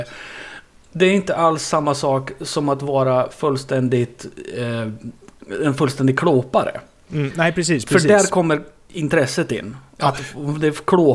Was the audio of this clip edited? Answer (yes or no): no